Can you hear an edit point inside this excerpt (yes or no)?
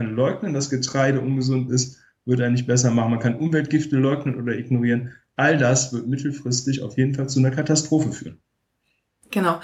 no